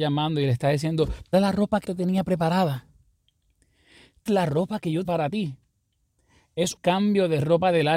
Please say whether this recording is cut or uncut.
cut